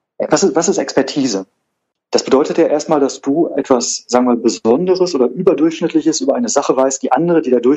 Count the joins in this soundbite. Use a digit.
0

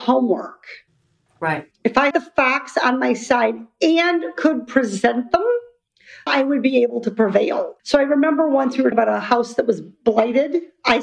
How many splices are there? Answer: 4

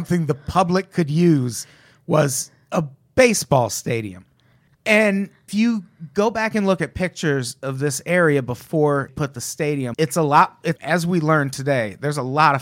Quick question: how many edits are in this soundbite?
4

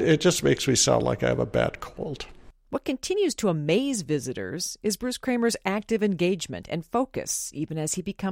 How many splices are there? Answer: 0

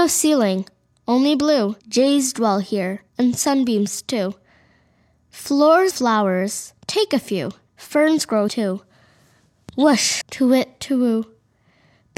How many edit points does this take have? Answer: 6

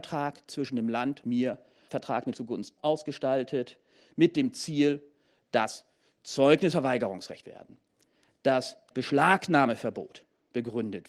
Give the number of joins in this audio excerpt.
6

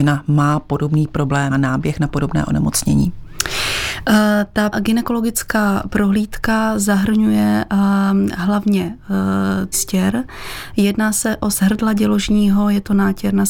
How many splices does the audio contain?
4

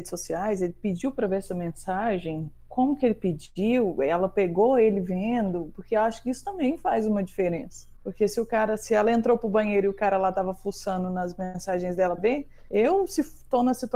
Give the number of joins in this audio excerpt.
1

